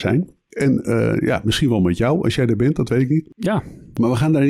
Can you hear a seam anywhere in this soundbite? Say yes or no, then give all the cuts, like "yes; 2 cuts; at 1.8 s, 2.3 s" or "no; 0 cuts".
no; 0 cuts